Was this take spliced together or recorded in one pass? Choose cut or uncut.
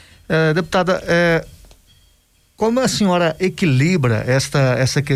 uncut